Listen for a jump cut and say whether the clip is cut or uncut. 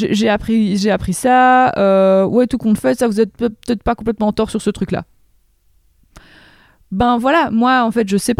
uncut